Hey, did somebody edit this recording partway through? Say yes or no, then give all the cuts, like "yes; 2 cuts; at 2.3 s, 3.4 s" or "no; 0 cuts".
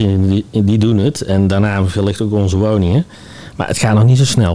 no; 0 cuts